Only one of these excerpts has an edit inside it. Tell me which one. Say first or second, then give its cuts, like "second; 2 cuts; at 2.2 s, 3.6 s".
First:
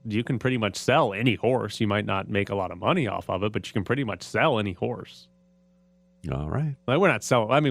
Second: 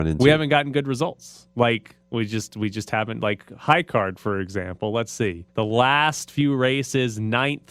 second; 1 cut; at 5.5 s